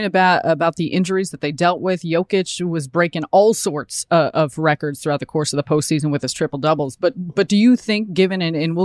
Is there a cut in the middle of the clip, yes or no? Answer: no